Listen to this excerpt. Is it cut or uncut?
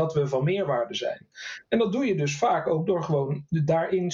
uncut